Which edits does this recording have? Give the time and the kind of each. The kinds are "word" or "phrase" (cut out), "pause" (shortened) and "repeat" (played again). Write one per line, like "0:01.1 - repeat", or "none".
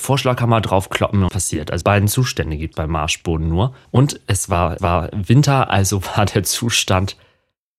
0:01.3 - word
0:01.8 - word
0:02.7 - word
0:03.8 - pause
0:04.8 - repeat